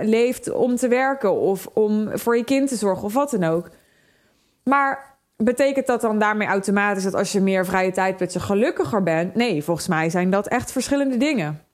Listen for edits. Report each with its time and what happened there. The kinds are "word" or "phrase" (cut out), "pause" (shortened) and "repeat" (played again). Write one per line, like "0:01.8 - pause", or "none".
none